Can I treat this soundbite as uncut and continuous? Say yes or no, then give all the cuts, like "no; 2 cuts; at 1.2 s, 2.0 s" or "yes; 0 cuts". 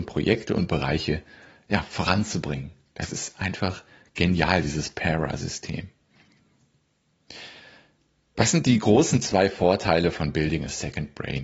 yes; 0 cuts